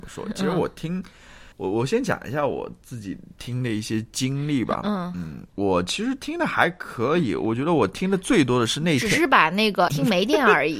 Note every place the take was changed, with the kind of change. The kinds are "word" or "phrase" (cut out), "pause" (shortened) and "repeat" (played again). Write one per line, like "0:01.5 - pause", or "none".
0:01.5 - pause
0:05.5 - pause
0:09.9 - word